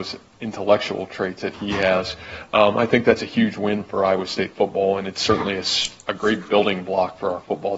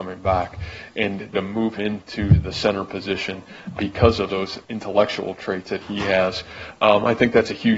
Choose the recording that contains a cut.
second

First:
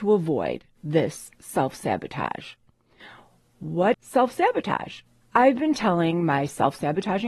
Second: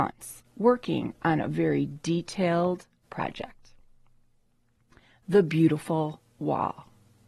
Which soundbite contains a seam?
first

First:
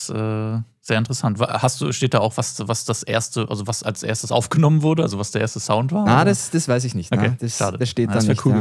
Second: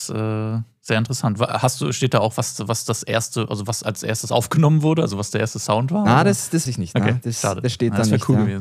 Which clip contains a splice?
second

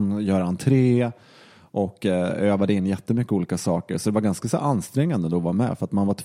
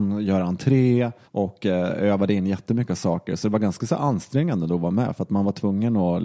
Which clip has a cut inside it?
second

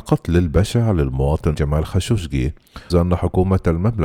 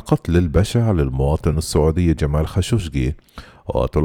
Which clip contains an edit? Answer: first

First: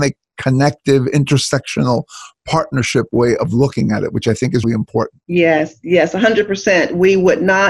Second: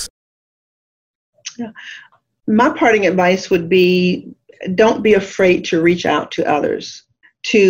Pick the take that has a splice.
first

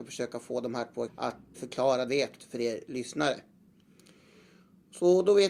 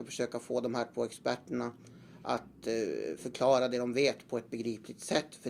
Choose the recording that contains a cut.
first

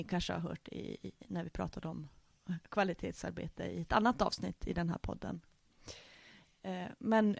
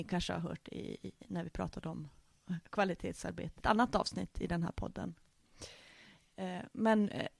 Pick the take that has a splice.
second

